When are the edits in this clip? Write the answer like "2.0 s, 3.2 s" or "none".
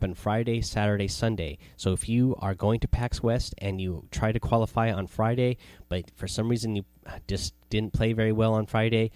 none